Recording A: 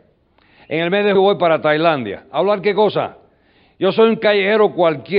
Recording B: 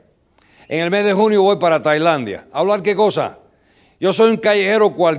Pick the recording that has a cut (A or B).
A